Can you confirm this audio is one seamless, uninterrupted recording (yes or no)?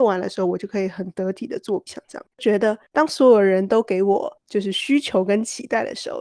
no